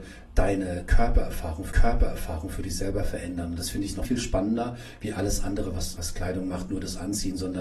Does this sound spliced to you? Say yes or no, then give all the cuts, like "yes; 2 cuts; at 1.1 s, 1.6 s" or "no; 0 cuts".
yes; 3 cuts; at 1.7 s, 4.1 s, 6.0 s